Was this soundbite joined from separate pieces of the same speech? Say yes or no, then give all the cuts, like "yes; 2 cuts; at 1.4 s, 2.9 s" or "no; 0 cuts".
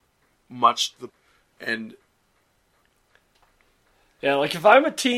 yes; 1 cut; at 1.1 s